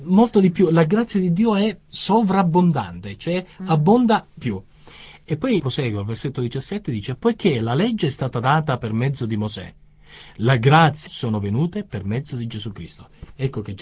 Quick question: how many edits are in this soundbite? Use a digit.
3